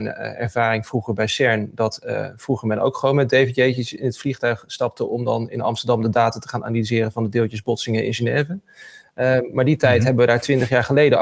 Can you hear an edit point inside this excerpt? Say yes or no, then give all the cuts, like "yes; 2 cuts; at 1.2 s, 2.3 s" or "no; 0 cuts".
no; 0 cuts